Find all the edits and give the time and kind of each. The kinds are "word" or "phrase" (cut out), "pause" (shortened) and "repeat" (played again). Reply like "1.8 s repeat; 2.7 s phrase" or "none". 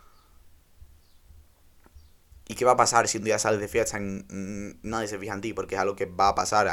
none